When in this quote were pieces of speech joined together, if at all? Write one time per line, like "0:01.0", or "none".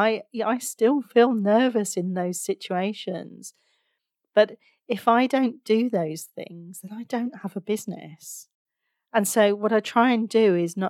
none